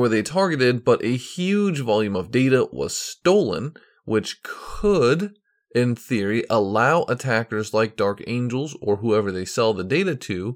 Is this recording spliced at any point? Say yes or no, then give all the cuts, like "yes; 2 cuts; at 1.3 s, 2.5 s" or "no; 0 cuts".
no; 0 cuts